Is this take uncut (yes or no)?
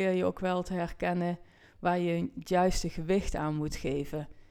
yes